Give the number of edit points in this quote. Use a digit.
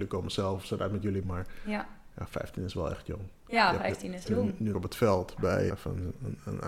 4